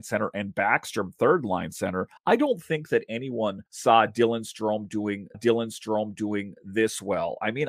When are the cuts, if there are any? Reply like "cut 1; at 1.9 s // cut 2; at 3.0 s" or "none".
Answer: cut 1; at 2.2 s // cut 2; at 3.7 s // cut 3; at 5.3 s